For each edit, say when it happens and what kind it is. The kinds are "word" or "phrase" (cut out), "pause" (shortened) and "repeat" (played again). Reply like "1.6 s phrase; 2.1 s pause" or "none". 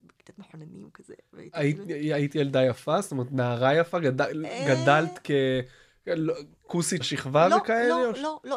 7.0 s word